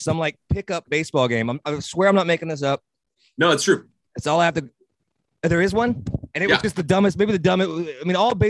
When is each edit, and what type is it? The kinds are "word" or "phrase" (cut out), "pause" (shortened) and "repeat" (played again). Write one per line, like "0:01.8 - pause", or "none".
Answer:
none